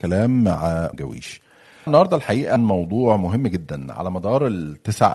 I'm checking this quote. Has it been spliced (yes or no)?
yes